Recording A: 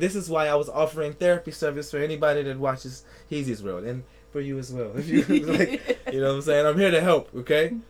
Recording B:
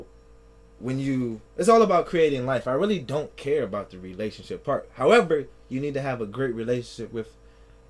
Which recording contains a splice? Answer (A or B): B